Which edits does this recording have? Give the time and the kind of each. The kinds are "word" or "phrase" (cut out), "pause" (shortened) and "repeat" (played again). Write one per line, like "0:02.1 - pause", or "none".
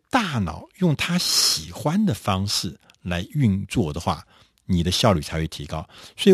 none